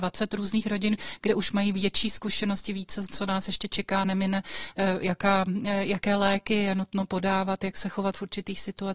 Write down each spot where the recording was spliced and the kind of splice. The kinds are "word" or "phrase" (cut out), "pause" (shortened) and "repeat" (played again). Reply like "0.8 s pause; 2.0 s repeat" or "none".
none